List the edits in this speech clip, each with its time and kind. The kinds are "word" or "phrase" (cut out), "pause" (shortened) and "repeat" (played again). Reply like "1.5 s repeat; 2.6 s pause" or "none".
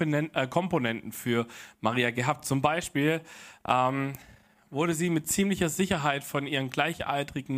none